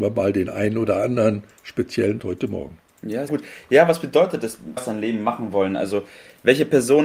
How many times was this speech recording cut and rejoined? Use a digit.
3